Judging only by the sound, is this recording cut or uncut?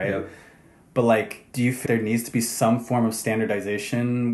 cut